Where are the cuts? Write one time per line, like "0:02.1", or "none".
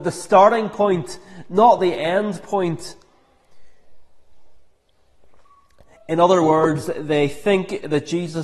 none